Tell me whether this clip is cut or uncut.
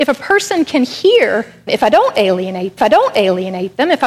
cut